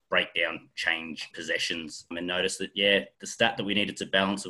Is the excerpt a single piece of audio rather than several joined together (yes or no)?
no